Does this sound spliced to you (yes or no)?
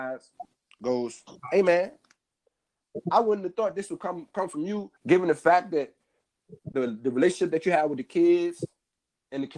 yes